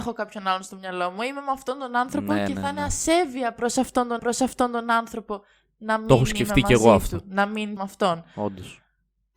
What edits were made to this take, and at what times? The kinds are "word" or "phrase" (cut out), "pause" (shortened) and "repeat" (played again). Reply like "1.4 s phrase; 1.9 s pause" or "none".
4.2 s repeat; 7.8 s word

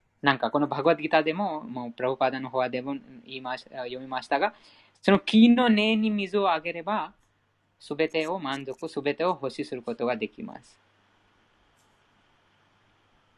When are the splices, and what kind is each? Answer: none

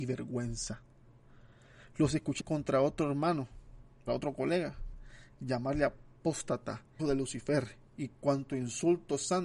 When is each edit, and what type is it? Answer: 2.4 s word; 4.1 s word; 7.0 s word

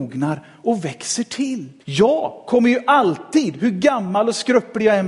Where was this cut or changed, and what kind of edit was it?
1.8 s pause

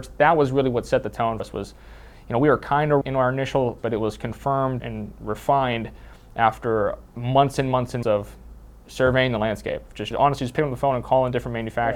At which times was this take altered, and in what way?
1.4 s word; 3.0 s word; 3.8 s word; 4.8 s word; 8.0 s word; 10.1 s word

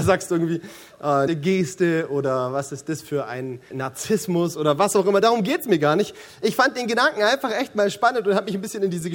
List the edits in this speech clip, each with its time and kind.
1.3 s word; 3.7 s word

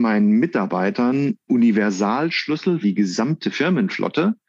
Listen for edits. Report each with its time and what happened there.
1.5 s word; 2.8 s word

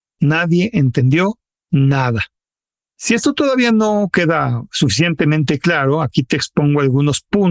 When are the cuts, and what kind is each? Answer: 2.6 s pause

